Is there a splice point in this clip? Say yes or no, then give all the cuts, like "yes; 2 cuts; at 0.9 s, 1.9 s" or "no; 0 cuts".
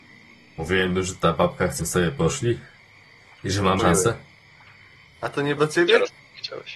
yes; 3 cuts; at 1.8 s, 3.8 s, 5.6 s